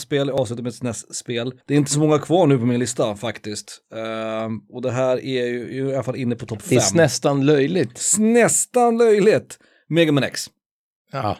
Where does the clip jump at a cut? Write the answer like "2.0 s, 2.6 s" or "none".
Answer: 1.6 s